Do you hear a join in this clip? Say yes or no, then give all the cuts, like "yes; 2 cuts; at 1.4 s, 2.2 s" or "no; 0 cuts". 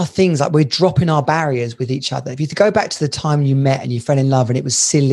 no; 0 cuts